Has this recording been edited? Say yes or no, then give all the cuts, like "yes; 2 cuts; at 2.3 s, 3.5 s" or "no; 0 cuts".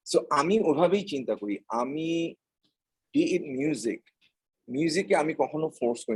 no; 0 cuts